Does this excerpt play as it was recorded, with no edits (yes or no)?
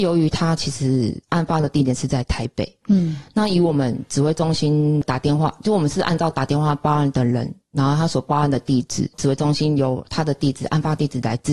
no